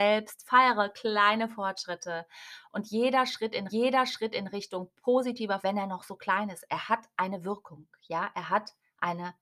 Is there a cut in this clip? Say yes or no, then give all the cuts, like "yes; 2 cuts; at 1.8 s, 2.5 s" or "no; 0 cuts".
yes; 2 cuts; at 3.7 s, 5.6 s